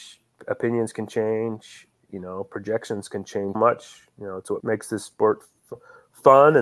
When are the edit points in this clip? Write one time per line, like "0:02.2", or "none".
0:03.5
0:04.6